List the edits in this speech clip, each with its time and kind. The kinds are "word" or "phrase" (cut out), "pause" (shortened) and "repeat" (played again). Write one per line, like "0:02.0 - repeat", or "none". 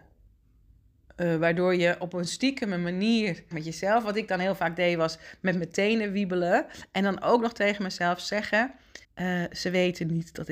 0:03.5 - phrase
0:09.0 - pause